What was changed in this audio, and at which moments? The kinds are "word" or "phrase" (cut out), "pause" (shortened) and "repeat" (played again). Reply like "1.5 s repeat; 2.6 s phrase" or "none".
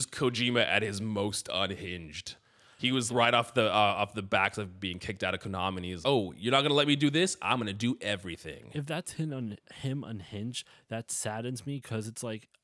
3.1 s word; 6.0 s word